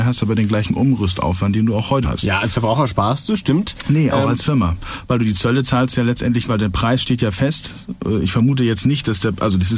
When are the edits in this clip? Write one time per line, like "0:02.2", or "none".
0:02.0
0:06.5